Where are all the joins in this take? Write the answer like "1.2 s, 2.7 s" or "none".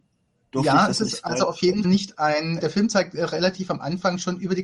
1.8 s, 2.6 s